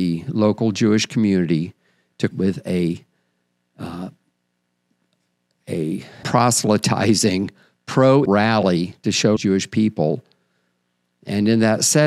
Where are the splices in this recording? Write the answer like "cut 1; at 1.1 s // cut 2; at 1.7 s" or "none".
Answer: cut 1; at 2.3 s // cut 2; at 6.2 s // cut 3; at 8.2 s // cut 4; at 9.4 s